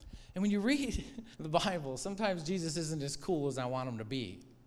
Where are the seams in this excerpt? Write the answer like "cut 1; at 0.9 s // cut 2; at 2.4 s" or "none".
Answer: cut 1; at 1.3 s